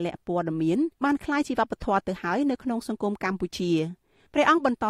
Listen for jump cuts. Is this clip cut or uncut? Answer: cut